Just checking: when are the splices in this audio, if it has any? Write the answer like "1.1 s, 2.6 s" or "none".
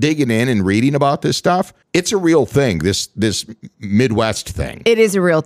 1.8 s